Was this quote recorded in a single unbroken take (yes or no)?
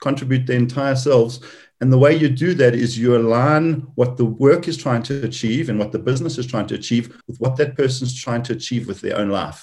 no